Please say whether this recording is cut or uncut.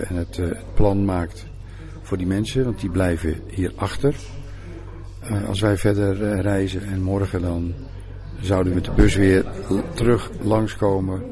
cut